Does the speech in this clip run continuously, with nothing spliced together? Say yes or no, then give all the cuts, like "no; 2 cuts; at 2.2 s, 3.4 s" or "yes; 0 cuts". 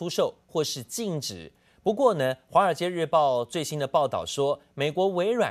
yes; 0 cuts